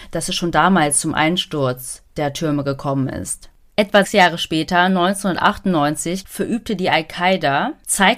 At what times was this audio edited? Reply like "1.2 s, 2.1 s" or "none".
2.1 s, 4.0 s